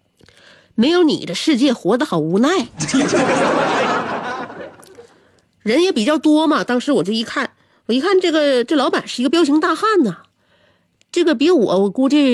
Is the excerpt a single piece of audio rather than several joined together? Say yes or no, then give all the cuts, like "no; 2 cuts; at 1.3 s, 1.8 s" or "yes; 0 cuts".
yes; 0 cuts